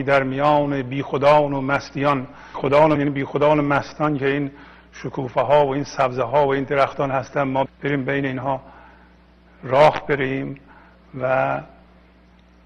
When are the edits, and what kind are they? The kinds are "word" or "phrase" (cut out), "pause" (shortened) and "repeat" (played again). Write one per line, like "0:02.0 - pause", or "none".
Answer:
0:02.5 - word
0:03.0 - word
0:07.7 - word